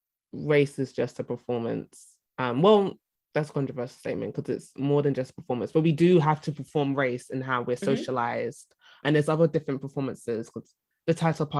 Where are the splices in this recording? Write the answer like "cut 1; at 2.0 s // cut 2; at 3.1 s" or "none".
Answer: none